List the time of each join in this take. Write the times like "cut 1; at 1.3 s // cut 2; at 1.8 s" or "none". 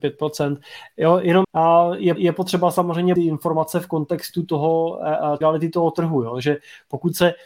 cut 1; at 1.4 s // cut 2; at 2.2 s // cut 3; at 3.2 s // cut 4; at 5.4 s